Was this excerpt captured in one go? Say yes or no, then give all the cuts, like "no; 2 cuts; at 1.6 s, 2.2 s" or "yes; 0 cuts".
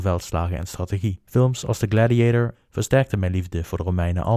no; 2 cuts; at 1.3 s, 2.5 s